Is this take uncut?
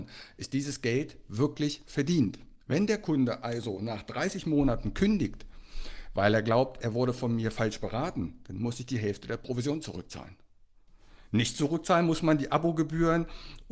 no; 1 cut; at 2.6 s

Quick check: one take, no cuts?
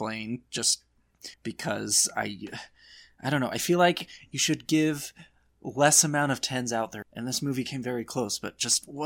no; 2 cuts; at 1.3 s, 7.0 s

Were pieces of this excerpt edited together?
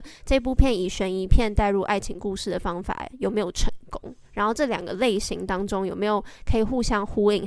yes; 1 cut; at 4.2 s

